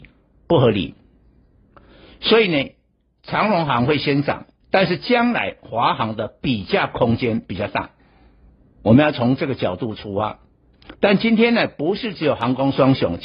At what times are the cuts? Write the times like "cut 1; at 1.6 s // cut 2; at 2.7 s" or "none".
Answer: cut 1; at 4.6 s // cut 2; at 10.9 s

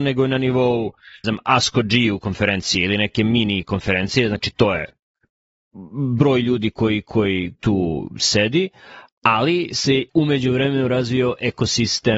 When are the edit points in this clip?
cut 1; at 1.2 s // cut 2; at 7.5 s // cut 3; at 10.1 s

